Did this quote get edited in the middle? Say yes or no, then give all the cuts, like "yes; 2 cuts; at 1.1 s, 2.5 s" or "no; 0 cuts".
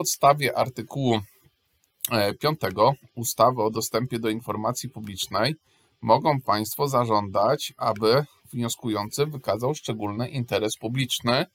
no; 0 cuts